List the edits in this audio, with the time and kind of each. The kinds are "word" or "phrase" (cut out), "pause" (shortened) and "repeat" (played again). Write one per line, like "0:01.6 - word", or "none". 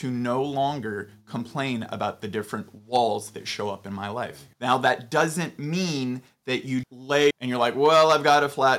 0:04.5 - pause
0:06.8 - word
0:07.3 - word